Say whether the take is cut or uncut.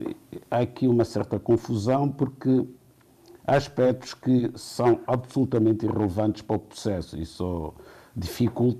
uncut